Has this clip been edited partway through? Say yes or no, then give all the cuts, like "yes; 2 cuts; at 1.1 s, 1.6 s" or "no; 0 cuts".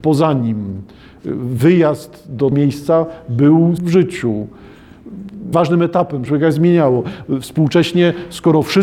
yes; 4 cuts; at 2.5 s, 3.8 s, 5.5 s, 6.3 s